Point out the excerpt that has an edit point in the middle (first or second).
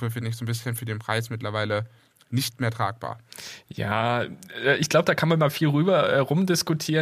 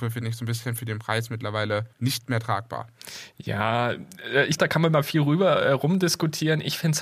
second